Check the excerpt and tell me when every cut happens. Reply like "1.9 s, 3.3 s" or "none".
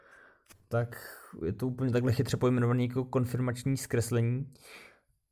none